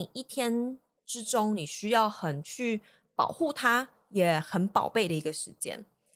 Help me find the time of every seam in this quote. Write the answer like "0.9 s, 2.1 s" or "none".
none